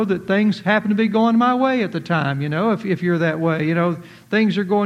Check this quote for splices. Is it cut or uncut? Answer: uncut